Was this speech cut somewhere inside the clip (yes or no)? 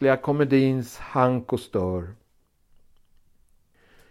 no